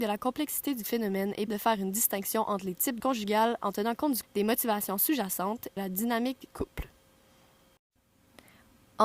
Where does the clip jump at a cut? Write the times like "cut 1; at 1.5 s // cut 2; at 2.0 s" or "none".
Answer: cut 1; at 1.5 s // cut 2; at 3.0 s // cut 3; at 4.2 s // cut 4; at 5.8 s // cut 5; at 6.5 s